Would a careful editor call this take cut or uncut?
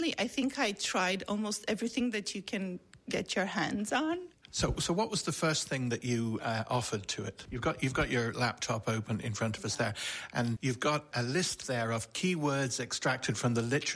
cut